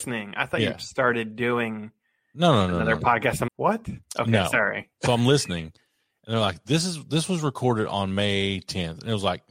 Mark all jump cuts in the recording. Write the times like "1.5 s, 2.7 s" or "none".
3.5 s